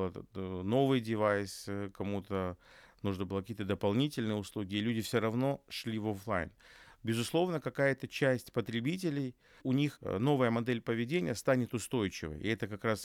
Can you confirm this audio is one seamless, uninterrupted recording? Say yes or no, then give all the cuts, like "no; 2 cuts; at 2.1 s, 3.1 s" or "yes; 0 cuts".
yes; 0 cuts